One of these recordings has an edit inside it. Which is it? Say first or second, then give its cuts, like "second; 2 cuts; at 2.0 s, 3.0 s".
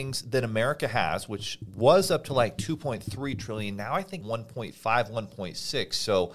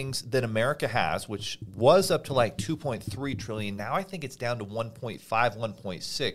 first; 1 cut; at 4.2 s